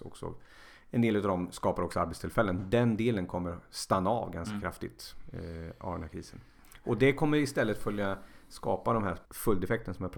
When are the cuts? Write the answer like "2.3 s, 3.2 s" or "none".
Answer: 9.2 s